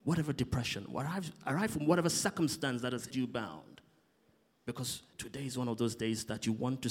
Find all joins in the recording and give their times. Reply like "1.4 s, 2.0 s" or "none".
3.1 s, 5.1 s